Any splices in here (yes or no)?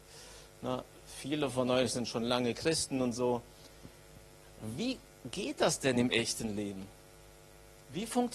no